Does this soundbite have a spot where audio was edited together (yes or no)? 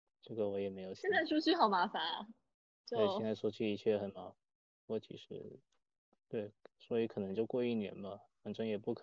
no